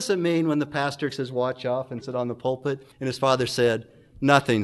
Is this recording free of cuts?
no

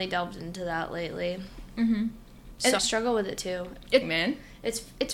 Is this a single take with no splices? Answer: no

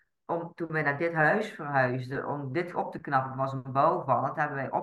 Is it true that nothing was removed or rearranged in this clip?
no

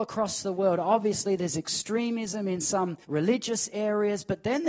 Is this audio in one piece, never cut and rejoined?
no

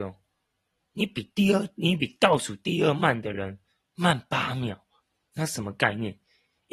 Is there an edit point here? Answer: no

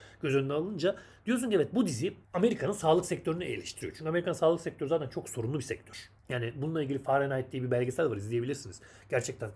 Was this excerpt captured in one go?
no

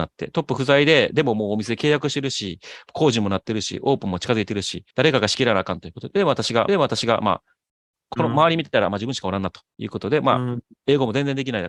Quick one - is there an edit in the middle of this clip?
yes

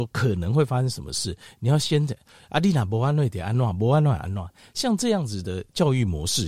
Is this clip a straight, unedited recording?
yes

